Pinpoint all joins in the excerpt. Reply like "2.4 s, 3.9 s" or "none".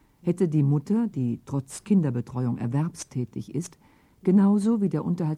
none